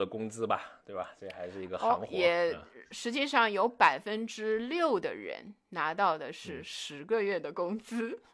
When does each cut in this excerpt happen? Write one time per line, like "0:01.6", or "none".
none